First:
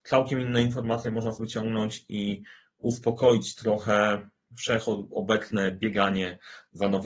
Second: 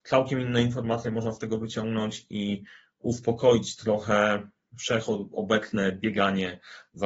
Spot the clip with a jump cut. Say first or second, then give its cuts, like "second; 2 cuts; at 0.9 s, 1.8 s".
first; 1 cut; at 1.4 s